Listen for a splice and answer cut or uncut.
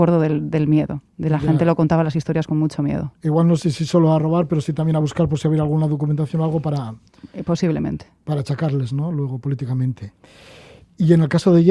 uncut